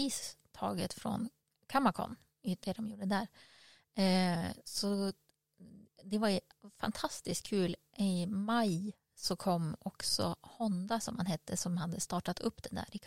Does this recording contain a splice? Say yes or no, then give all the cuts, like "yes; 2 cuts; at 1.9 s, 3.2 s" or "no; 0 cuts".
no; 0 cuts